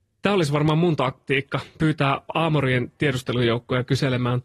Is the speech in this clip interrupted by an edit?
no; 0 cuts

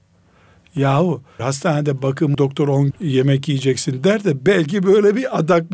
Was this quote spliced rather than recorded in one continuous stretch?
yes; 3 cuts; at 1.4 s, 2.3 s, 2.9 s

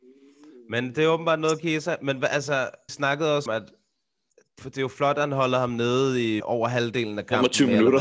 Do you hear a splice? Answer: yes; 4 cuts; at 2.9 s, 3.5 s, 4.6 s, 6.4 s

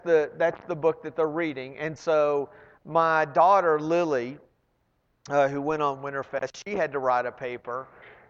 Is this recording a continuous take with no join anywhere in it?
yes; 0 cuts

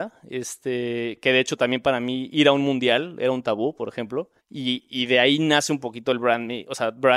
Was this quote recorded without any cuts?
no; 1 cut; at 4.4 s

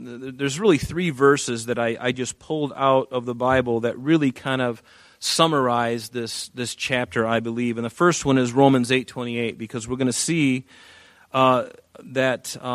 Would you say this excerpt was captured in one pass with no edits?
yes; 0 cuts

